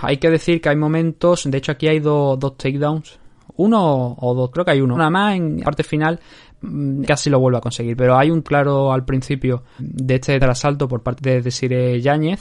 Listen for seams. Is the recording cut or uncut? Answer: cut